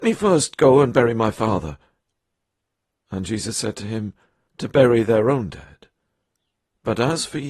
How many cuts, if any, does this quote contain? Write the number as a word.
one